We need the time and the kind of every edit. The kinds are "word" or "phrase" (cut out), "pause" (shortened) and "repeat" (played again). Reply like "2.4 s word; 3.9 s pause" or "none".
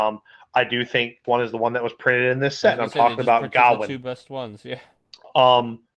1.2 s phrase